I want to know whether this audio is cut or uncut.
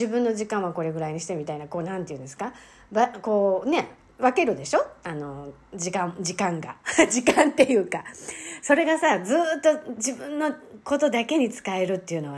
uncut